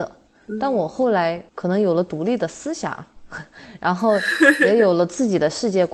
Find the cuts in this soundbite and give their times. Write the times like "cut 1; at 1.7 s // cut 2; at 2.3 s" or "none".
cut 1; at 1.5 s